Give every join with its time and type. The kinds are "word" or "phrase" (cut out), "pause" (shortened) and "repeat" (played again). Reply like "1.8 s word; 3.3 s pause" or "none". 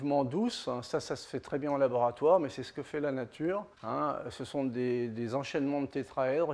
3.7 s pause